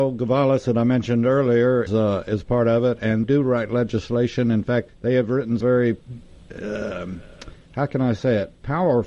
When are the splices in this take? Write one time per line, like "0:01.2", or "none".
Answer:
0:01.9
0:03.2
0:04.9
0:05.6